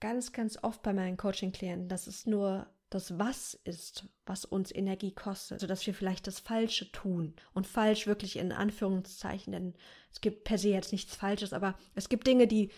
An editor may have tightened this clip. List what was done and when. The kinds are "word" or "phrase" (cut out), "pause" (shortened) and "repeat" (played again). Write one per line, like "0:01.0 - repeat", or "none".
0:02.2 - word
0:05.6 - word
0:07.4 - pause